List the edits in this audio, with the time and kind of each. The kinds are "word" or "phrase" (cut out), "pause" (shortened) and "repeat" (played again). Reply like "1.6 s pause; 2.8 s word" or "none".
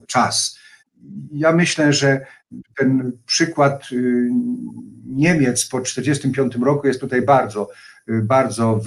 none